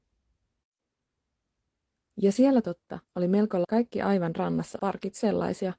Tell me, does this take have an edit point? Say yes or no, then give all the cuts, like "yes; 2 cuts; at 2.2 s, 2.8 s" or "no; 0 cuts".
yes; 4 cuts; at 2.6 s, 3.0 s, 3.6 s, 4.8 s